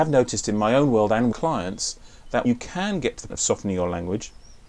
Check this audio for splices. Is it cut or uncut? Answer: cut